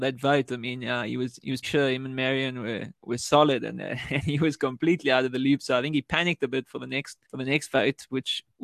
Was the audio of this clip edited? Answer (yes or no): yes